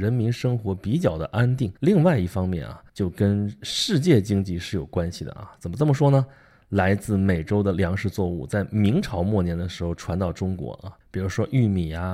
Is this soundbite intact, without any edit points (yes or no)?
no